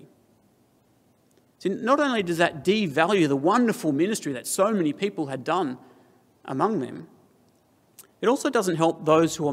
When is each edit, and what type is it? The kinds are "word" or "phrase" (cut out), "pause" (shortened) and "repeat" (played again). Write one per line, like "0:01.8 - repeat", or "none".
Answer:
none